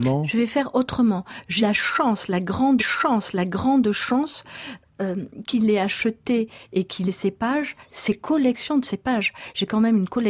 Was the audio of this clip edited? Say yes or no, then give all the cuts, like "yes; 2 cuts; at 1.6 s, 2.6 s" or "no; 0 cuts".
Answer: yes; 3 cuts; at 1.6 s, 2.8 s, 7.1 s